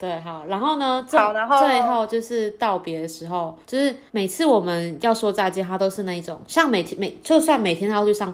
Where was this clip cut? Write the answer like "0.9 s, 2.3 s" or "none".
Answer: 3.6 s, 4.1 s